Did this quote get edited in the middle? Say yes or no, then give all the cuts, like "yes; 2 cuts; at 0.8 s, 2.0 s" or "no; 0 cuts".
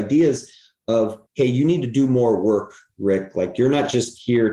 yes; 1 cut; at 1.3 s